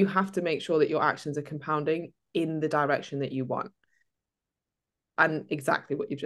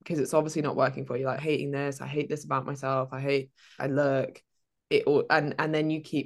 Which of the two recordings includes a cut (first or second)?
second